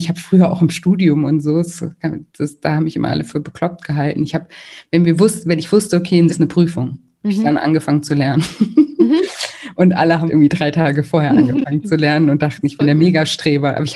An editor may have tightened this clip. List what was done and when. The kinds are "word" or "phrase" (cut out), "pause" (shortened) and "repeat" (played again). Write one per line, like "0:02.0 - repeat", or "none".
0:02.3 - pause
0:06.3 - phrase
0:10.3 - word

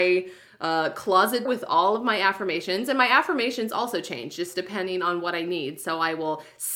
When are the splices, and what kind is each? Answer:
0:01.5 - word

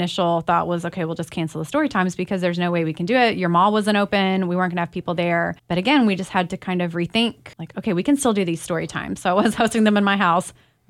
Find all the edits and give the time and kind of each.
0:05.6 - pause
0:07.5 - pause

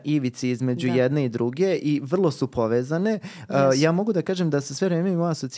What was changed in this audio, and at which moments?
none

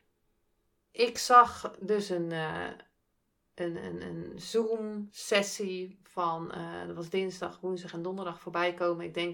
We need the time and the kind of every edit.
none

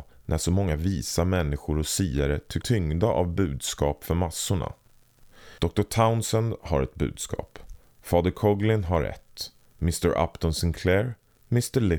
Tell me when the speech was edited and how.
0:02.6 - word
0:05.6 - pause

